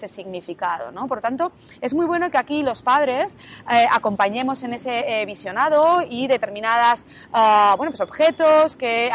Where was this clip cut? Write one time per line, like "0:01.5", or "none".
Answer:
none